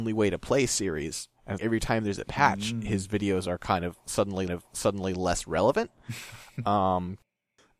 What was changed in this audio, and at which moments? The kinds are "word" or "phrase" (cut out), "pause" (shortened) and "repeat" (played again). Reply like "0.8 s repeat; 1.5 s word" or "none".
1.6 s word; 4.5 s repeat